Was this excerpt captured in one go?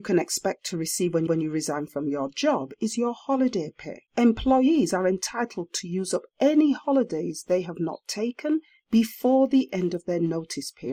no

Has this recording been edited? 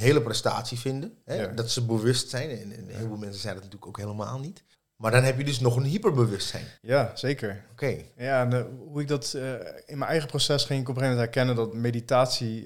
yes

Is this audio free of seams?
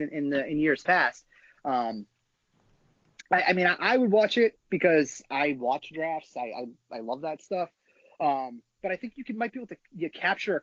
yes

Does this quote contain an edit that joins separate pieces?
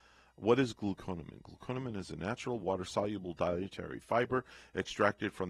no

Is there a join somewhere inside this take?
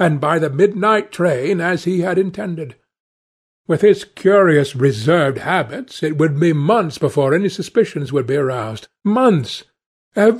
no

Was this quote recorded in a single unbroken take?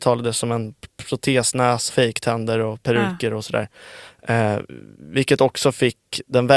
no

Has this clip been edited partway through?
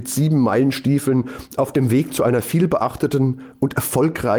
no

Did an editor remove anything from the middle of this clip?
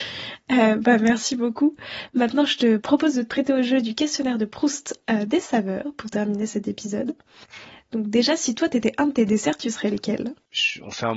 no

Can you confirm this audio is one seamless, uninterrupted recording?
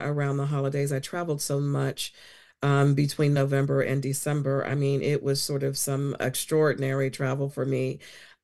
yes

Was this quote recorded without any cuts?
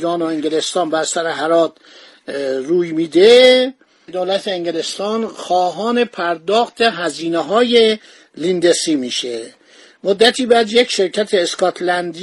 yes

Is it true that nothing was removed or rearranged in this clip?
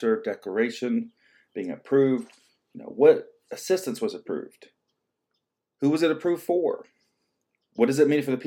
yes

